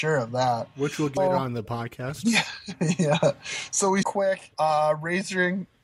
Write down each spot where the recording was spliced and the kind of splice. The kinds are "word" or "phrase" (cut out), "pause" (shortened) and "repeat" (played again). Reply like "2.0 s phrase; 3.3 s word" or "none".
1.2 s word; 4.0 s word; 4.5 s pause